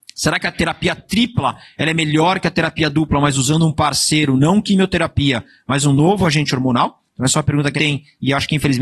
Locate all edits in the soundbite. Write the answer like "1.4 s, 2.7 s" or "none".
7.8 s